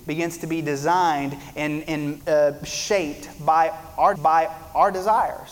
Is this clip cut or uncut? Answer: cut